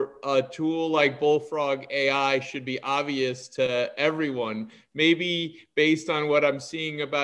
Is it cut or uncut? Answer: uncut